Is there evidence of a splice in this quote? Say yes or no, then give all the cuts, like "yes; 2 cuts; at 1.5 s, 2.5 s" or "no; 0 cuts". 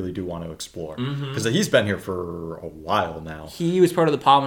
no; 0 cuts